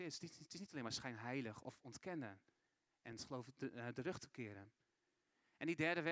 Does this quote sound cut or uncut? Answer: uncut